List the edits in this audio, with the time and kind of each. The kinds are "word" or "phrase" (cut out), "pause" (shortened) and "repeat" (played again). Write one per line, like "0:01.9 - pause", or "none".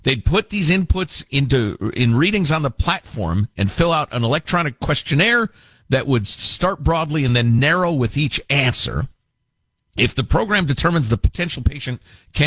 none

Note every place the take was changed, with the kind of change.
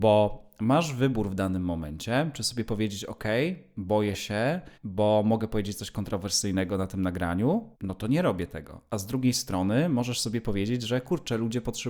0:04.7 - pause
0:07.7 - pause

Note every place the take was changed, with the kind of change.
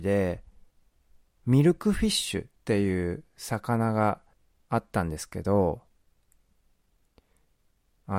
0:02.6 - pause
0:04.3 - pause

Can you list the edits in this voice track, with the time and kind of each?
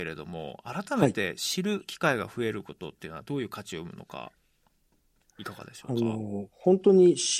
none

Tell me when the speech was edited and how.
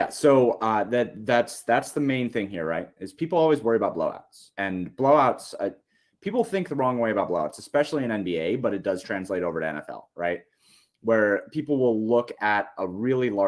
0:04.5 - pause

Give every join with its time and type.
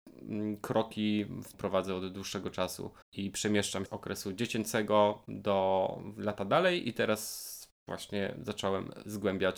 0:01.5 - phrase
0:03.0 - pause
0:03.9 - phrase

